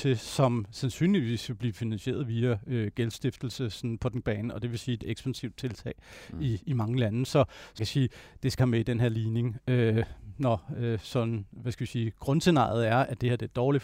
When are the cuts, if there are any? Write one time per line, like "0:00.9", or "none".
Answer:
0:04.2
0:07.8
0:08.6